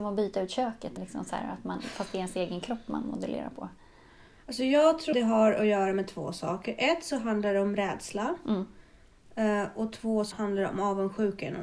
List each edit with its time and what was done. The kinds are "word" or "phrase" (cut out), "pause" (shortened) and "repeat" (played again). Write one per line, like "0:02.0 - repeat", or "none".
0:01.0 - word
0:05.1 - word
0:10.3 - word